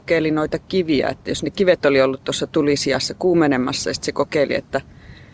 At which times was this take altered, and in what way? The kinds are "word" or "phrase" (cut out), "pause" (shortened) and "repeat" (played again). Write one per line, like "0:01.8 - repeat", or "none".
0:01.5 - word